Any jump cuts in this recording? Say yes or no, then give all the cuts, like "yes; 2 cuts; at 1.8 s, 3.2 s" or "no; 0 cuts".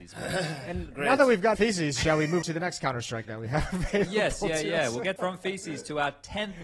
yes; 4 cuts; at 1.5 s, 2.4 s, 3.2 s, 5.2 s